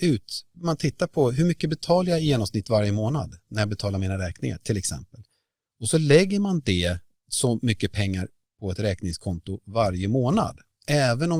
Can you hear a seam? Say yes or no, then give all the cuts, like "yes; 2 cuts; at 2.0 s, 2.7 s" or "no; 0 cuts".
no; 0 cuts